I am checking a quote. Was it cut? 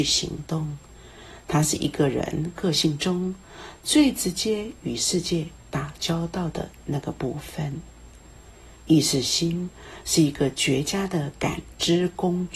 yes; 1 cut; at 8.8 s

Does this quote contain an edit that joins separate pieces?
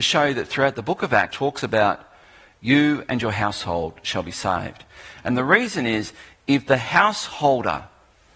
yes; 1 cut; at 1.3 s

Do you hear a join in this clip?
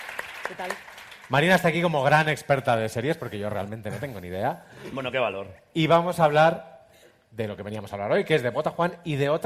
no; 0 cuts

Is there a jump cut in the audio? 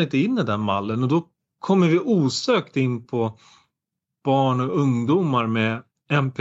no; 0 cuts

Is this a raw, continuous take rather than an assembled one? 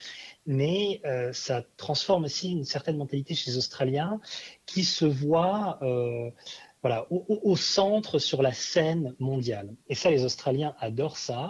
yes; 0 cuts

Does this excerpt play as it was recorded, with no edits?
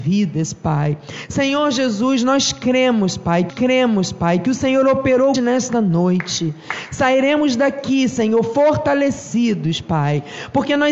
no; 2 cuts; at 3.5 s, 5.3 s

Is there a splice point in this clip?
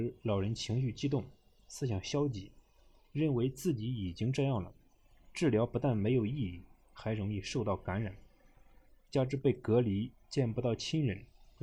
no; 0 cuts

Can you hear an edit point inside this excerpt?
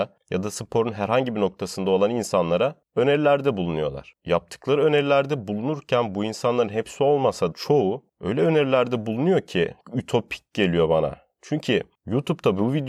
yes; 1 cut; at 7.5 s

